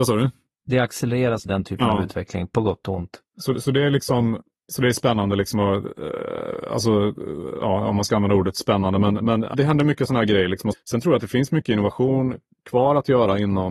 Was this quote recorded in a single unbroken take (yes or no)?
no